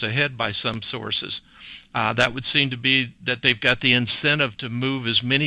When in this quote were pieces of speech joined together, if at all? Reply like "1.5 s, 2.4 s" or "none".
none